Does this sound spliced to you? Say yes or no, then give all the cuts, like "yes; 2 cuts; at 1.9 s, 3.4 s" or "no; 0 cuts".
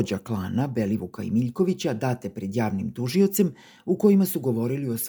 no; 0 cuts